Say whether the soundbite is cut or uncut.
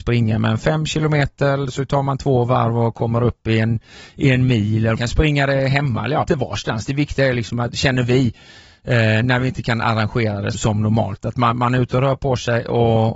cut